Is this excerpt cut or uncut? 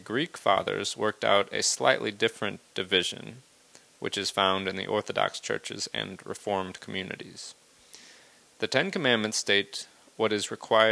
uncut